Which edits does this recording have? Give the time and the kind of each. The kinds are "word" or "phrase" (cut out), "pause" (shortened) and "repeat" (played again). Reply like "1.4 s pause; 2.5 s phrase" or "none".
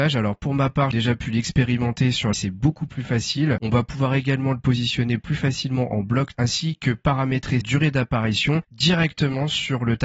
0.9 s word; 2.3 s word; 6.3 s word; 7.6 s word